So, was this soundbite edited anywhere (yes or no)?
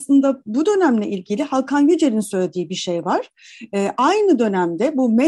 no